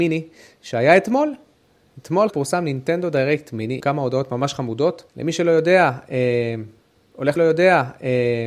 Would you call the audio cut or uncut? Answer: cut